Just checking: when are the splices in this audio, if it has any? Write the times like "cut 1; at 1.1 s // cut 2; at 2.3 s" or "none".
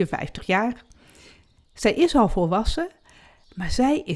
none